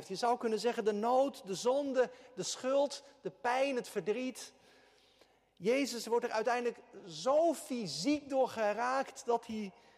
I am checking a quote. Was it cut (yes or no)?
no